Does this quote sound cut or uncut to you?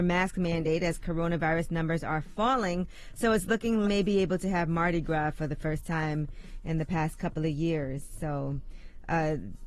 cut